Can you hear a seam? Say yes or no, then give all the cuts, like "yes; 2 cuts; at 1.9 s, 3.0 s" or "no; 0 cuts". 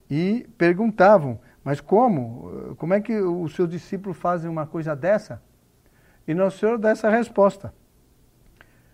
no; 0 cuts